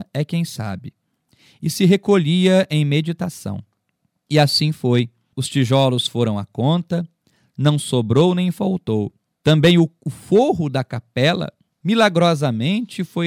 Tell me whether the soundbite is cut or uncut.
uncut